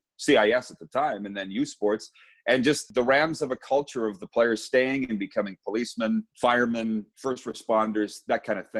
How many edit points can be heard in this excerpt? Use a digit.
0